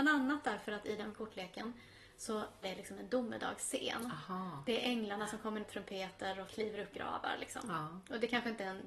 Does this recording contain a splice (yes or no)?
yes